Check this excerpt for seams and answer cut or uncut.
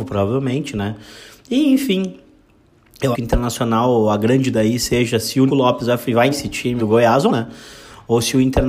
cut